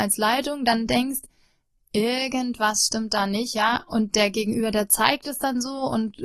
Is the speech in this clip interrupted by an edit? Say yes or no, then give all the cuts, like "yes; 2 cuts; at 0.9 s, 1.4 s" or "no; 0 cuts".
no; 0 cuts